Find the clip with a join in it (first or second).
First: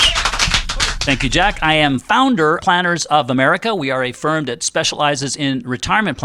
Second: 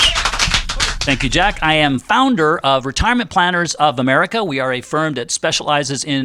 first